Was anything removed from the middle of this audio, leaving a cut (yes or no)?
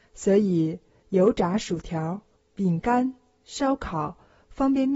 no